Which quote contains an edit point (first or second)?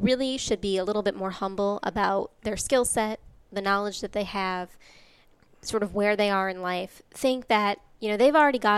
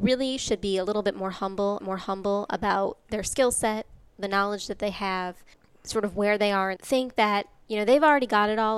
second